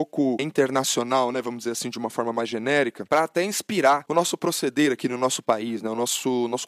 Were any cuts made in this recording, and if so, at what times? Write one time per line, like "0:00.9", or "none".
none